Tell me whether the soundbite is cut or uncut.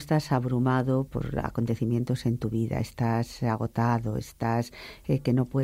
cut